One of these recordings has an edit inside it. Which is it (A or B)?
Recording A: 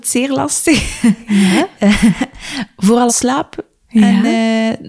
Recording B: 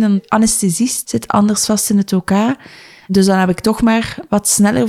A